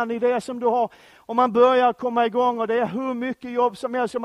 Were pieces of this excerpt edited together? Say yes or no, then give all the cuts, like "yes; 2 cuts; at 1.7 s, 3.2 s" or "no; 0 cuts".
no; 0 cuts